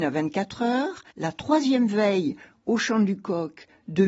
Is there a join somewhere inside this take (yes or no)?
yes